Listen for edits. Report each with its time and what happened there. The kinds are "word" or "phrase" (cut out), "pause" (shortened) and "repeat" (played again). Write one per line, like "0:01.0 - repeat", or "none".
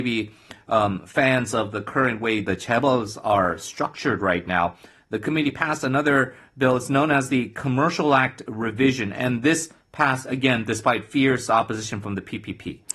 none